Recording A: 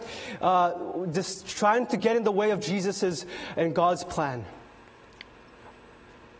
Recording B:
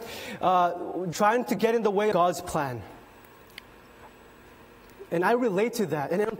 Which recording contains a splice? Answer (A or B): B